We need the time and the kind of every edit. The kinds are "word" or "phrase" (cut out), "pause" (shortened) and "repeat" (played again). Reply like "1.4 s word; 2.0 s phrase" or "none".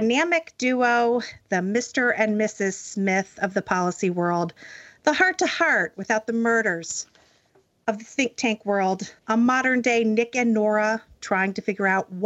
9.2 s pause